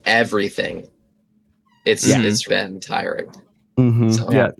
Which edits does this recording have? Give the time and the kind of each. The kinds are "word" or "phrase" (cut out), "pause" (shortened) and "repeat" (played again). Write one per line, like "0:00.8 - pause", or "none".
0:02.5 - word

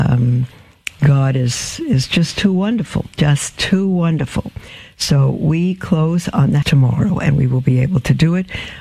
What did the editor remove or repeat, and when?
0:01.0 - phrase
0:06.6 - word

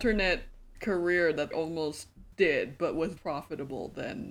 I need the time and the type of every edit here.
0:01.5 - word
0:03.2 - word

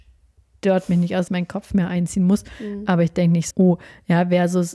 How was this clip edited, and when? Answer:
0:01.3 - word
0:03.5 - word

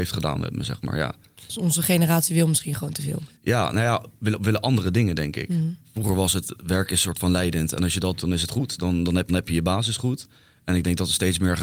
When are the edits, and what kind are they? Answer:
0:03.4 - pause
0:08.2 - word
0:09.3 - repeat

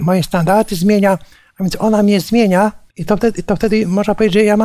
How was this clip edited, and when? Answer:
0:02.9 - pause

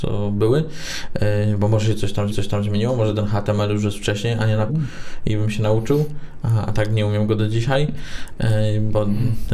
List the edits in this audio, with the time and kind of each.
0:02.3 - repeat
0:04.7 - phrase

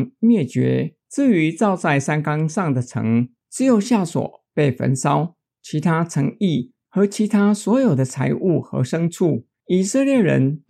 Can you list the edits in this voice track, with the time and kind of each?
0:01.0 - pause

